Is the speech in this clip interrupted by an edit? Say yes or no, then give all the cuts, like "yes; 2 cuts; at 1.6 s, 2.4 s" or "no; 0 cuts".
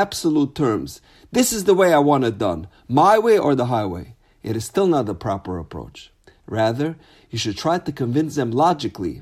no; 0 cuts